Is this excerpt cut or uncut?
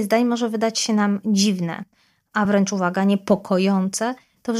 uncut